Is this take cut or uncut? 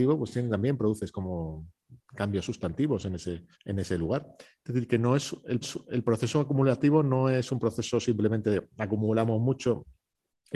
cut